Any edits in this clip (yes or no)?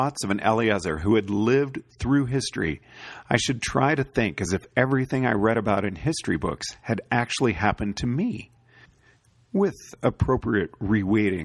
no